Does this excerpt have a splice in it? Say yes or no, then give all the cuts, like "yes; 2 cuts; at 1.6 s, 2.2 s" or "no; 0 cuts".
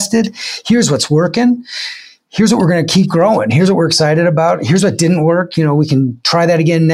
no; 0 cuts